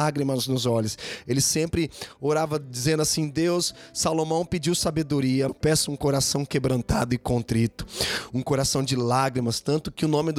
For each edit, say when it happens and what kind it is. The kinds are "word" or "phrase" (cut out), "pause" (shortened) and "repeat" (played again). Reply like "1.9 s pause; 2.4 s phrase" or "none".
5.5 s word